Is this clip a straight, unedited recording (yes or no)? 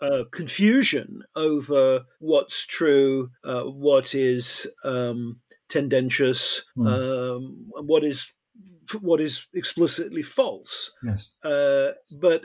no